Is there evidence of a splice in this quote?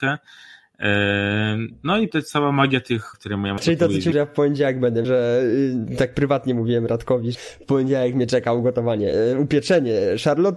yes; 6 cuts; at 2.1 s, 3.1 s, 3.6 s, 4.1 s, 5.0 s, 7.3 s

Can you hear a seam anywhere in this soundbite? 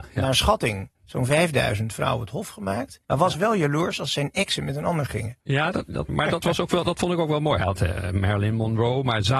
yes; 4 cuts; at 0.9 s, 3.0 s, 5.4 s, 6.1 s

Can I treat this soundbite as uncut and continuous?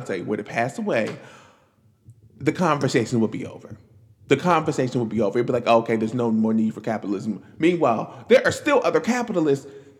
yes; 0 cuts

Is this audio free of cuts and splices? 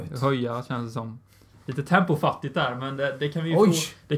yes; 0 cuts

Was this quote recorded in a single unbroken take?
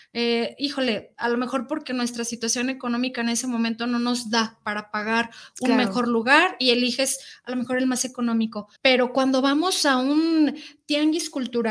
no; 1 cut; at 8.8 s

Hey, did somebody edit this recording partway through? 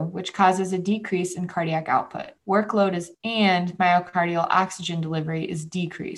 yes; 2 cuts; at 2.4 s, 3.1 s

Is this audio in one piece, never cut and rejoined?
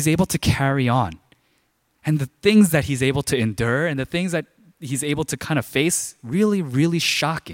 yes; 0 cuts

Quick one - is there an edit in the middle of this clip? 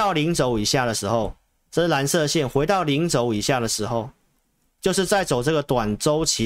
no; 0 cuts

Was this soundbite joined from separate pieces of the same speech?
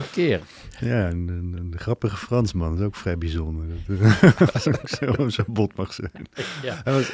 no; 0 cuts

